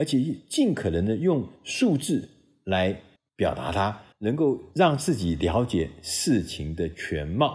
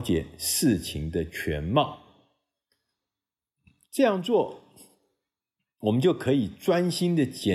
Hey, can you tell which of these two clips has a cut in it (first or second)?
first